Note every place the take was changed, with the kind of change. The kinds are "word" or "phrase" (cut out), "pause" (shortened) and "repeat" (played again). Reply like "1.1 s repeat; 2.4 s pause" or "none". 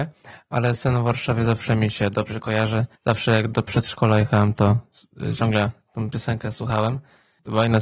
3.0 s pause